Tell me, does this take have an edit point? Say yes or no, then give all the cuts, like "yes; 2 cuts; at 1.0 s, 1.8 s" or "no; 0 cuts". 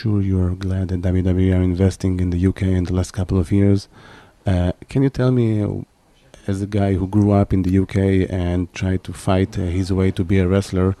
no; 0 cuts